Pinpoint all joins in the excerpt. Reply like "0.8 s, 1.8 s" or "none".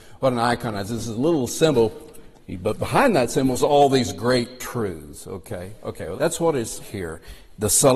3.6 s, 6.2 s, 6.8 s